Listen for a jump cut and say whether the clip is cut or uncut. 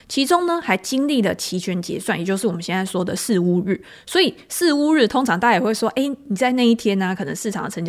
uncut